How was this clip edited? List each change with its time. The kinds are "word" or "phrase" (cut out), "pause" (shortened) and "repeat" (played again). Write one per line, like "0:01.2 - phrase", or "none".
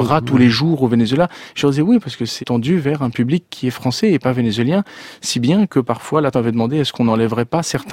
0:02.4 - word
0:06.3 - word